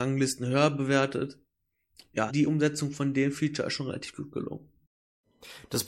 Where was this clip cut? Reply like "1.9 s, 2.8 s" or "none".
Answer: 2.3 s